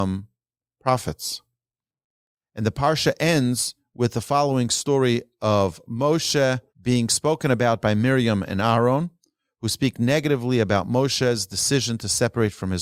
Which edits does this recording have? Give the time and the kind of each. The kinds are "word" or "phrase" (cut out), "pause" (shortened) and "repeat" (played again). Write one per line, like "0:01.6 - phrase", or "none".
0:06.7 - pause